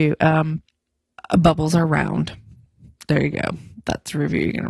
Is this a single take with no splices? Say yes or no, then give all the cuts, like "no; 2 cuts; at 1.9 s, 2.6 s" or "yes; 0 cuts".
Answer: yes; 0 cuts